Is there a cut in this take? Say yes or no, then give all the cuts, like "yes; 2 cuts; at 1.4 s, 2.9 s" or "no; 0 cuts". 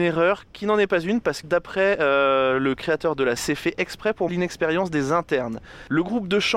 yes; 3 cuts; at 1.4 s, 3.4 s, 4.3 s